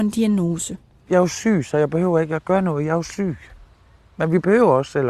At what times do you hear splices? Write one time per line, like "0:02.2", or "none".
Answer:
none